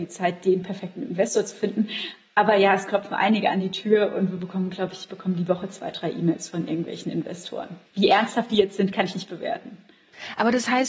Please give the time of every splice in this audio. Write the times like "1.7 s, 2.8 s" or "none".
7.9 s

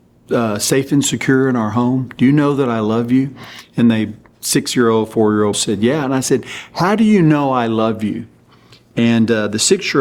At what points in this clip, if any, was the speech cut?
5.5 s

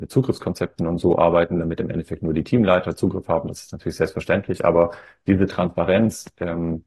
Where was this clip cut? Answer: none

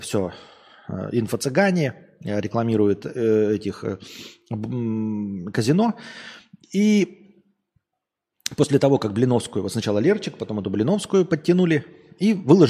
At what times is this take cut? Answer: none

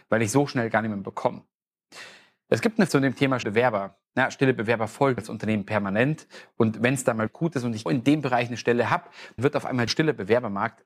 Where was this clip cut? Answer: 2.9 s, 3.4 s, 5.2 s, 7.3 s, 7.9 s, 9.4 s, 9.9 s

